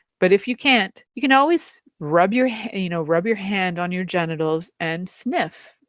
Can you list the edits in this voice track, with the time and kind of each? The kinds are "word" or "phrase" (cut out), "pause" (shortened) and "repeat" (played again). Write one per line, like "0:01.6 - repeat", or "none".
0:01.1 - pause

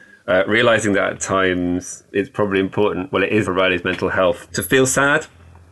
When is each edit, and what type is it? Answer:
0:02.1 - word
0:03.4 - word
0:04.5 - word

